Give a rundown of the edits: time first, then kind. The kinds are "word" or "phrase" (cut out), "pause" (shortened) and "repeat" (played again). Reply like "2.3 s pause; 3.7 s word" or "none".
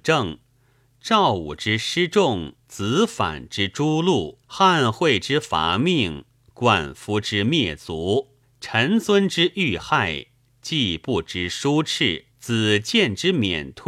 2.6 s pause; 4.4 s pause; 8.4 s pause; 12.3 s pause